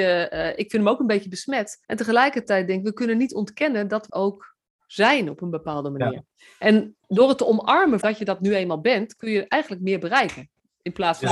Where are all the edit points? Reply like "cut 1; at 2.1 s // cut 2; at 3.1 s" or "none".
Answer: cut 1; at 1.8 s // cut 2; at 4.1 s // cut 3; at 7.0 s // cut 4; at 8.0 s